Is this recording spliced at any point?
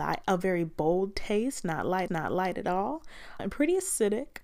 yes; 2 cuts; at 2.1 s, 3.4 s

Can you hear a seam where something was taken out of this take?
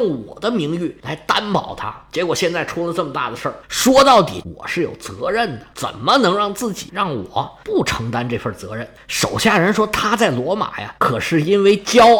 yes; 5 cuts; at 3.6 s, 4.4 s, 6.9 s, 7.6 s, 11.0 s

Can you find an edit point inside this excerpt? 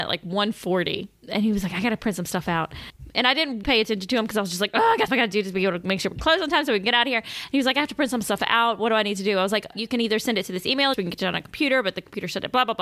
yes; 5 cuts; at 1.2 s, 3.6 s, 5.1 s, 9.7 s, 10.9 s

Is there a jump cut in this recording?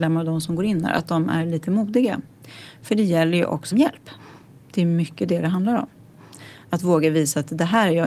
yes; 1 cut; at 3.7 s

